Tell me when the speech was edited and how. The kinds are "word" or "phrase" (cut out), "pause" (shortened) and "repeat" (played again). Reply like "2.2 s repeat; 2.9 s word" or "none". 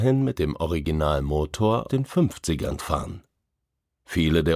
1.9 s word; 2.8 s word

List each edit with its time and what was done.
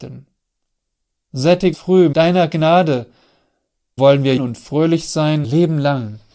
1.7 s word; 2.1 s word; 4.0 s word; 4.4 s word; 5.4 s word

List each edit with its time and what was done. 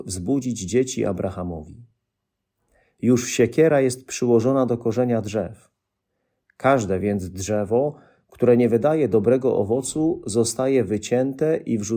none

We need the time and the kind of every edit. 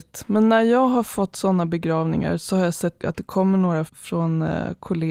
3.0 s phrase; 3.9 s word

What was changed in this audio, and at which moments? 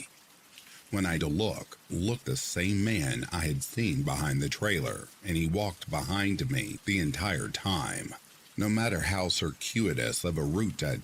1.2 s word; 1.9 s word; 2.2 s word

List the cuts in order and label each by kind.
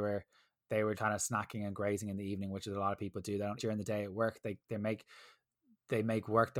0.9 s word; 3.6 s word; 4.6 s pause

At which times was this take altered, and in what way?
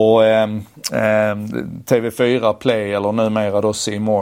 none

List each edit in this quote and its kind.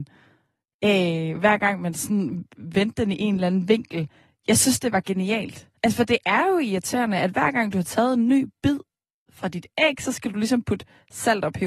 5.8 s pause

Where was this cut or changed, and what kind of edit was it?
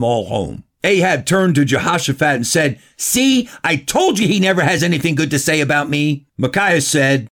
none

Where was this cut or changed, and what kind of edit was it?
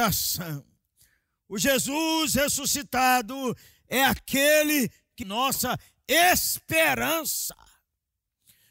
5.2 s word

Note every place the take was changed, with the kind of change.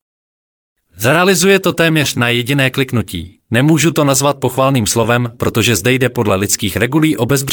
3.4 s pause

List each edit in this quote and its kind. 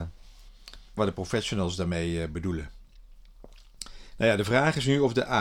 1.0 s word

